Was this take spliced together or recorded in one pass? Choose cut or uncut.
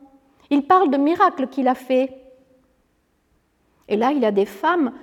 uncut